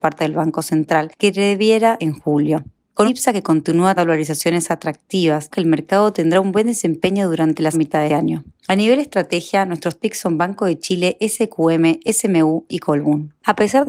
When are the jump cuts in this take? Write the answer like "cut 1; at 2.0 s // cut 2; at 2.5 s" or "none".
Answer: cut 1; at 2.0 s // cut 2; at 3.1 s // cut 3; at 4.0 s // cut 4; at 5.5 s // cut 5; at 7.7 s // cut 6; at 8.1 s // cut 7; at 10.0 s // cut 8; at 12.7 s